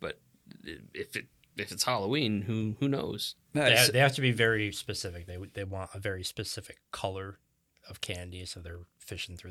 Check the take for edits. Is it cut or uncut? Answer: cut